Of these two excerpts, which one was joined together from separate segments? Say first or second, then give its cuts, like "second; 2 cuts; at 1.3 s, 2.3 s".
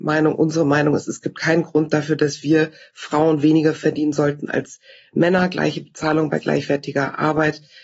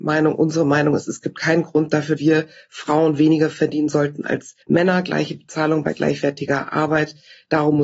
second; 2 cuts; at 2.2 s, 4.6 s